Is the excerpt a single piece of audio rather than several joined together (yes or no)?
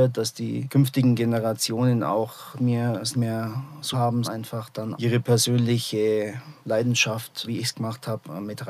no